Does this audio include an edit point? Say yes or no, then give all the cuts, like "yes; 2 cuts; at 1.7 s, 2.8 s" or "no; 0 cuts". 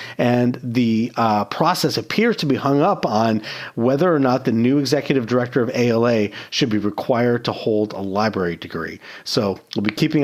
no; 0 cuts